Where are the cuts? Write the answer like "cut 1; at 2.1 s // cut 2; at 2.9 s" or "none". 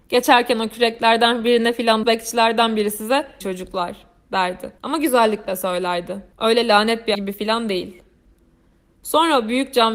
cut 1; at 2.0 s // cut 2; at 3.4 s // cut 3; at 4.8 s // cut 4; at 6.3 s // cut 5; at 7.1 s